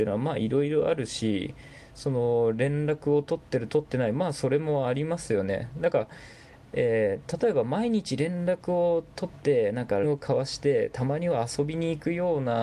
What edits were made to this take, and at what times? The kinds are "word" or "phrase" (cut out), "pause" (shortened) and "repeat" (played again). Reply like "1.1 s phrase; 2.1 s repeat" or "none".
10.0 s word